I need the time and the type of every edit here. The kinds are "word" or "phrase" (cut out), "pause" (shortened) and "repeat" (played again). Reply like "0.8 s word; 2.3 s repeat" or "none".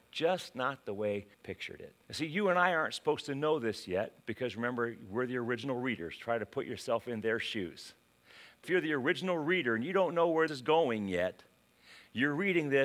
1.3 s word; 2.0 s pause; 4.2 s pause; 8.6 s word; 10.5 s word